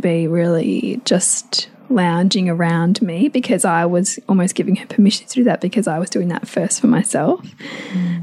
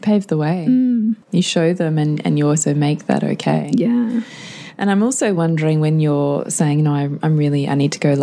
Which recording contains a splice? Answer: second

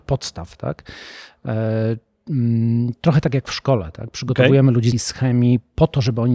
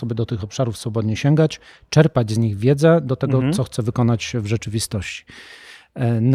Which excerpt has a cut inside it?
first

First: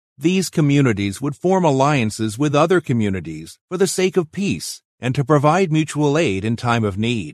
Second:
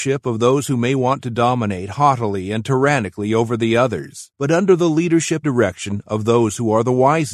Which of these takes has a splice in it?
second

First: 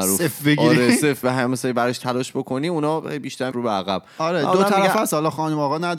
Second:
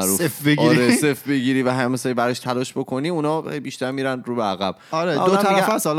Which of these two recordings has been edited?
first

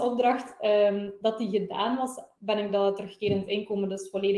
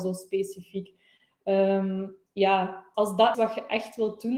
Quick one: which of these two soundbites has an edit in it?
second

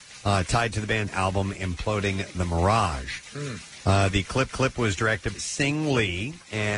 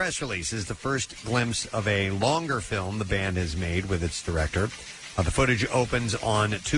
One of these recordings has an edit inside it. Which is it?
first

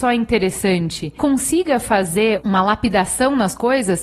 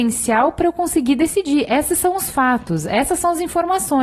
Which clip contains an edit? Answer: first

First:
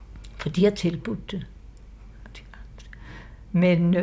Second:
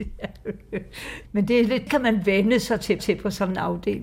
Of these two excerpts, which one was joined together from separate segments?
second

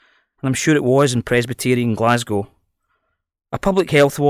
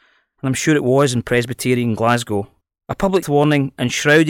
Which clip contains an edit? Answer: second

